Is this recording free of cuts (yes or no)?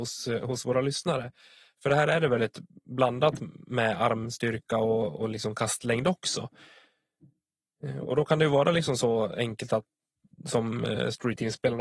yes